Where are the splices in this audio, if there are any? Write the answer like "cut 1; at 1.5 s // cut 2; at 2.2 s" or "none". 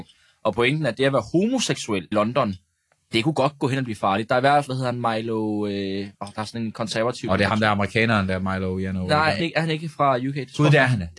cut 1; at 2.1 s // cut 2; at 4.7 s // cut 3; at 6.1 s // cut 4; at 9.4 s